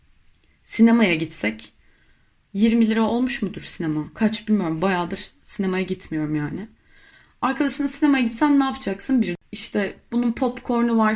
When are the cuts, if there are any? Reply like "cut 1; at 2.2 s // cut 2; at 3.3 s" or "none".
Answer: none